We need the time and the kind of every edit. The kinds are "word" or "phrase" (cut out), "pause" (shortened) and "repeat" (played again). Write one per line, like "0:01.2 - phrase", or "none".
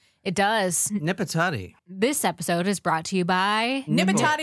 0:01.8 - pause